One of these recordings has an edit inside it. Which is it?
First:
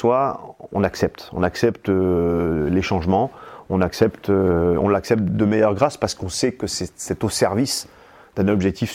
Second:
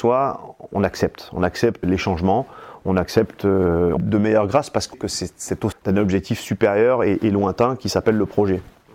second; 4 cuts; at 1.8 s, 4.0 s, 4.9 s, 5.7 s

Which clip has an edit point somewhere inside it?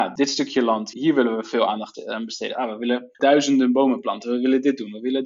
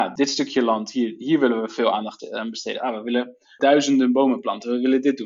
first; 2 cuts; at 0.9 s, 3.1 s

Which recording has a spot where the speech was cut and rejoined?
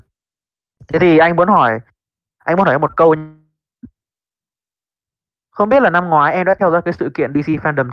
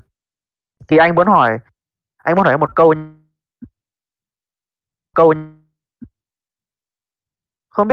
second; 2 cuts; at 0.9 s, 5.1 s

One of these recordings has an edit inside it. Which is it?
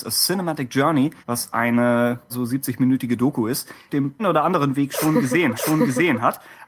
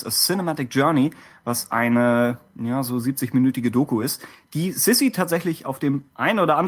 first; 5 cuts; at 1.2 s, 2.3 s, 3.9 s, 4.2 s, 5.5 s

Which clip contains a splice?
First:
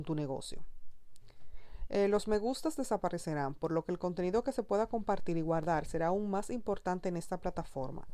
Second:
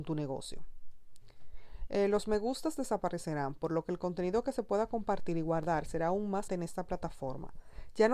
second; 1 cut; at 6.5 s

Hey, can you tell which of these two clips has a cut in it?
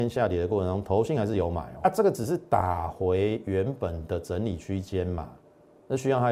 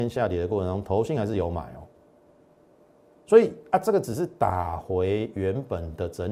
first; 1 cut; at 1.8 s

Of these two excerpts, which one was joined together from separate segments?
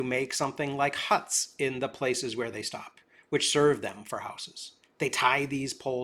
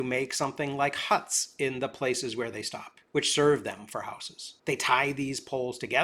second; 2 cuts; at 3.1 s, 4.6 s

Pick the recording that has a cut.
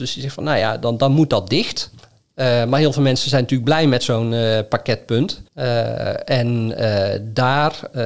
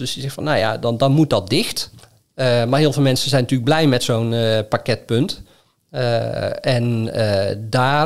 first; 1 cut; at 5.5 s

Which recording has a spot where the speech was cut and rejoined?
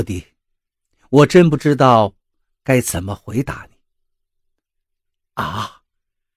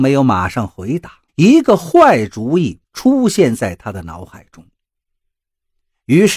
second; 2 cuts; at 1.3 s, 2.8 s

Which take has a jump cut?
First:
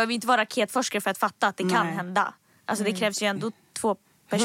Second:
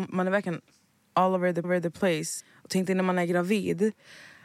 second; 1 cut; at 1.6 s

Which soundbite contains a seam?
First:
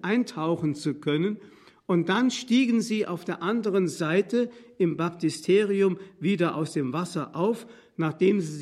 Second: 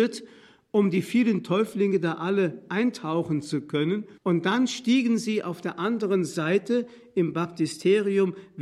second; 1 cut; at 4.2 s

